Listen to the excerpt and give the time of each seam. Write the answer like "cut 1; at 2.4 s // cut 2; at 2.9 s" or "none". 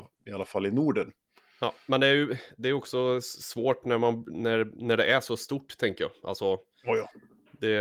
none